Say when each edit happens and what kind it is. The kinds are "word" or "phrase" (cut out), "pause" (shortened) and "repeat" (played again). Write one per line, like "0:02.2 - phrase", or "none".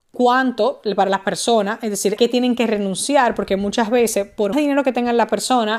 0:02.2 - word
0:04.5 - word